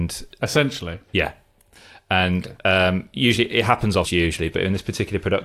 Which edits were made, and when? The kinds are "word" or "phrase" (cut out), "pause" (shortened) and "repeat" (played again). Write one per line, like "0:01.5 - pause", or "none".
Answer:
0:04.0 - word